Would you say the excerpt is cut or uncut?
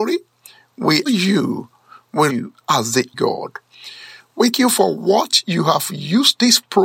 cut